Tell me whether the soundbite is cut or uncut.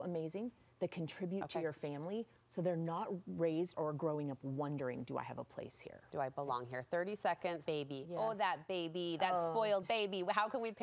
cut